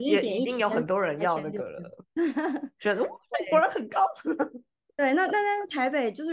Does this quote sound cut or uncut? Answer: uncut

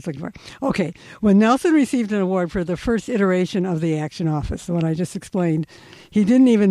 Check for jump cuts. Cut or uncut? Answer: uncut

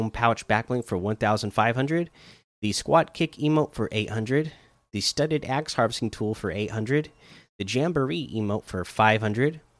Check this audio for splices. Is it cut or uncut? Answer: uncut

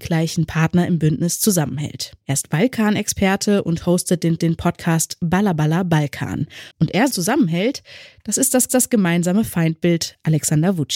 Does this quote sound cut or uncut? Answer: cut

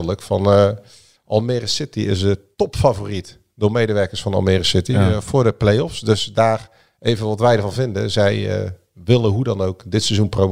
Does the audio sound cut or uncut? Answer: uncut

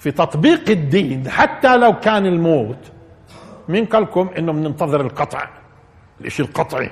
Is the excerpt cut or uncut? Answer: uncut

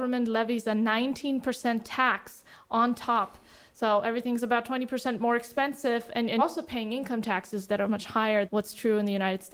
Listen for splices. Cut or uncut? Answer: cut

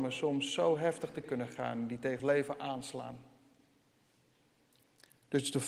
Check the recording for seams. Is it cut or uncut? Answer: cut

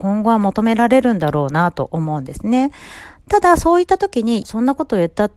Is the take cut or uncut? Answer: cut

